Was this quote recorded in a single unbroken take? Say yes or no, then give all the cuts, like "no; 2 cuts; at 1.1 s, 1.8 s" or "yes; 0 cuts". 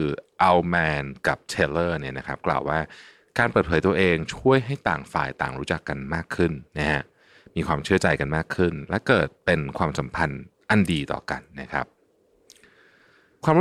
no; 1 cut; at 6.7 s